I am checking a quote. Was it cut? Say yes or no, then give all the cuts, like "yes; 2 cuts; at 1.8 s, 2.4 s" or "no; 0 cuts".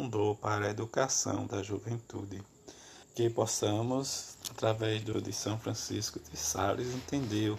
yes; 2 cuts; at 3.0 s, 5.1 s